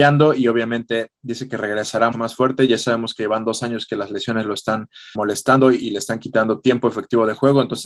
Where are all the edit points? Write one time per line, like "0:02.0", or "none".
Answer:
0:02.1
0:05.1